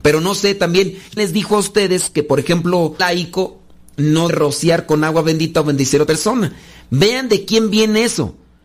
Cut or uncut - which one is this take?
cut